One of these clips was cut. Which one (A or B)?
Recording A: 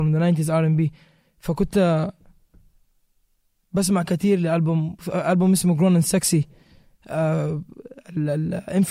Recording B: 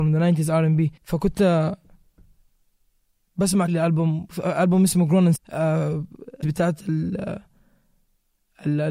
B